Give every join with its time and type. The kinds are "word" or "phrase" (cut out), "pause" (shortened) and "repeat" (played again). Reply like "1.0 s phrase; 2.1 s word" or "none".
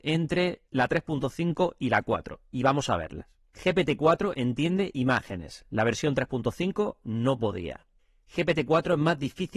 none